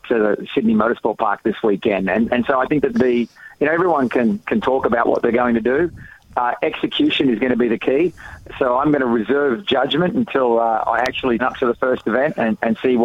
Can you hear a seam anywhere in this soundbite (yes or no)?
yes